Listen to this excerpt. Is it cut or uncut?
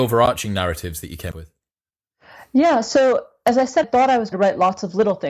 cut